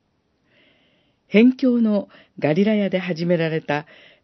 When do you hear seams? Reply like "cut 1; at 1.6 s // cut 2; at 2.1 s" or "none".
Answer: none